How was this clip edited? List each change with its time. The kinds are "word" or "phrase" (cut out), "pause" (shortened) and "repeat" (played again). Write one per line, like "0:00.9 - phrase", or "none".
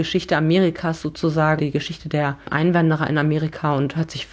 0:01.6 - word